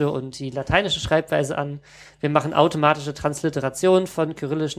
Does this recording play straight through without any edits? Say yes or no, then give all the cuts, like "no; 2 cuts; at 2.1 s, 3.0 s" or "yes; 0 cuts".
yes; 0 cuts